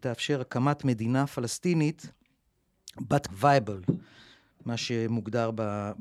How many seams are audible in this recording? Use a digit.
1